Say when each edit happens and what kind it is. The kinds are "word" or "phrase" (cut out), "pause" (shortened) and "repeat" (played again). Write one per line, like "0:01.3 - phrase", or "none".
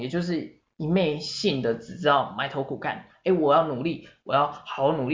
none